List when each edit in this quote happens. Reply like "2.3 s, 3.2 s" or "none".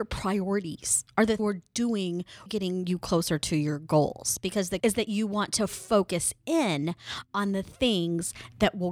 1.4 s, 2.5 s, 4.8 s